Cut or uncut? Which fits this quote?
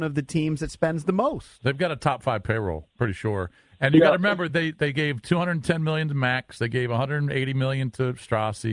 uncut